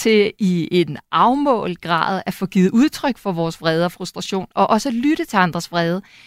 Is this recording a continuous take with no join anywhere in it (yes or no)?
yes